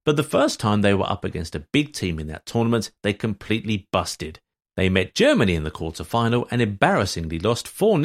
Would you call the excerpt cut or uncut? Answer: uncut